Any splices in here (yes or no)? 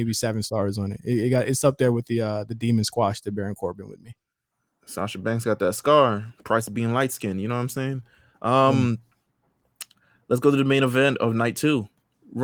no